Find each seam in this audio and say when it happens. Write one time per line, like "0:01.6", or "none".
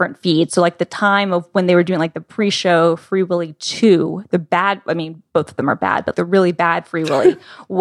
0:06.1